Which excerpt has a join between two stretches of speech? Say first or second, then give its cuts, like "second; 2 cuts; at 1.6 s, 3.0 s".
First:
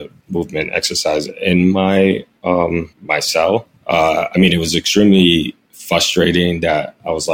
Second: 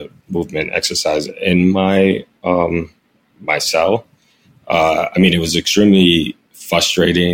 first; 2 cuts; at 2.9 s, 3.8 s